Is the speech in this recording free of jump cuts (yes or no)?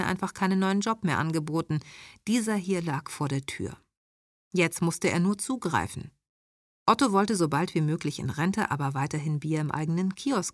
yes